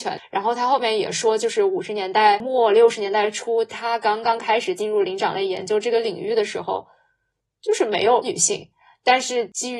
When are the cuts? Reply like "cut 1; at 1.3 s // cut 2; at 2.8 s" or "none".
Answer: none